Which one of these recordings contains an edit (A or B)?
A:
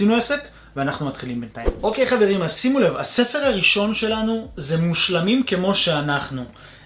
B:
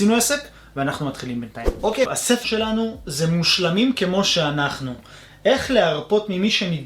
B